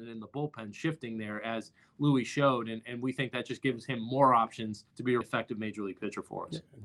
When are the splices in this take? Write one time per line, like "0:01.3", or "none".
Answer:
0:04.9
0:05.2

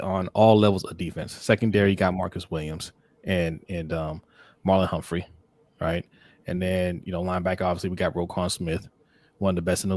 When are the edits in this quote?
none

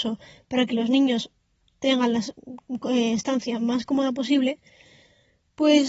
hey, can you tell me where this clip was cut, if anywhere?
none

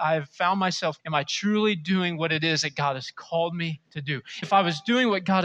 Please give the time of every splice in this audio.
0:01.0
0:03.9
0:04.4

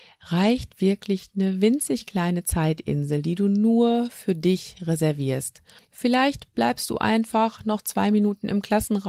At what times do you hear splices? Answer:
0:05.8

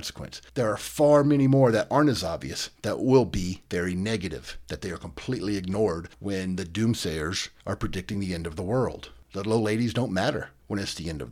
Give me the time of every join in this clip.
none

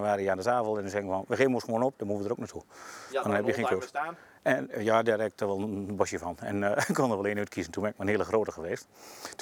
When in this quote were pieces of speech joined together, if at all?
none

